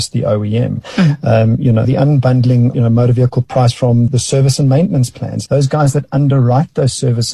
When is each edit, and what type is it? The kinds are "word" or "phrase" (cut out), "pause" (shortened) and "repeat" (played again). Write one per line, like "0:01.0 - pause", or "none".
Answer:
0:01.8 - word
0:02.7 - word
0:04.1 - word
0:05.5 - word